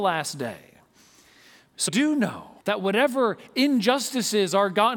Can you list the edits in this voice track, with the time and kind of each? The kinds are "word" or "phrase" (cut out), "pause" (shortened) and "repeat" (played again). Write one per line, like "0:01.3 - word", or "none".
0:01.9 - word
0:02.6 - pause